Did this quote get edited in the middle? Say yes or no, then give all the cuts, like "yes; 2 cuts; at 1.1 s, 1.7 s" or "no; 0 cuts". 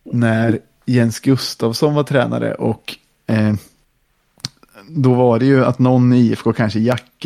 no; 0 cuts